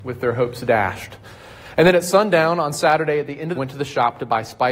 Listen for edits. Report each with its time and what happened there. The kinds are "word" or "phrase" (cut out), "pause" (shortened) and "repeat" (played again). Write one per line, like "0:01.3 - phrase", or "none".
0:03.5 - phrase